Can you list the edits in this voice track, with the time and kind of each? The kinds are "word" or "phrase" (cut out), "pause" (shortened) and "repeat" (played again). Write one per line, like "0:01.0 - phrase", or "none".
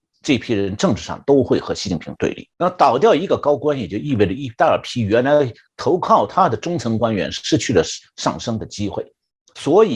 0:02.5 - pause